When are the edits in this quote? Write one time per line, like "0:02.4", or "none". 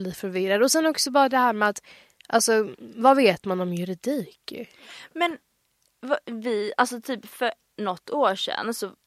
none